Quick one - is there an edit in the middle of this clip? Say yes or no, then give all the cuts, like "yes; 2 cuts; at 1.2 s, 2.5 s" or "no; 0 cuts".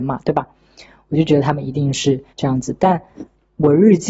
yes; 1 cut; at 2.3 s